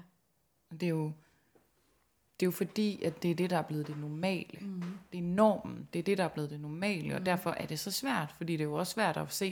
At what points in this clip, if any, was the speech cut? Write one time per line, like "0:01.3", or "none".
none